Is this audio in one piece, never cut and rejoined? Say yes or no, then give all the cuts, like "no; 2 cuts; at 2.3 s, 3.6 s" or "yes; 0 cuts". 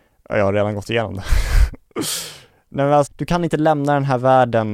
no; 1 cut; at 3.1 s